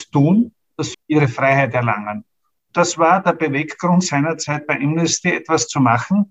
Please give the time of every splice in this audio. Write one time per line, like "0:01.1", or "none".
0:00.9